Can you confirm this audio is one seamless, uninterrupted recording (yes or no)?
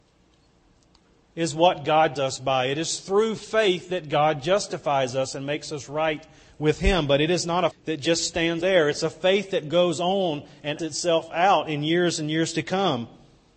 no